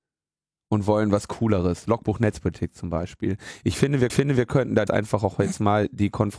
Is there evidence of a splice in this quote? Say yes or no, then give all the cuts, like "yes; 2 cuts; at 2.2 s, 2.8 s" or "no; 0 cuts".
yes; 2 cuts; at 4.1 s, 4.9 s